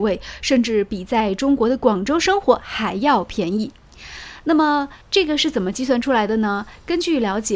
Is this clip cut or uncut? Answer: cut